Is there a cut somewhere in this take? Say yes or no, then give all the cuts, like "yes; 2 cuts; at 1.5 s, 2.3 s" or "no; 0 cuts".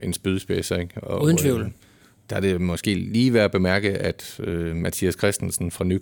no; 0 cuts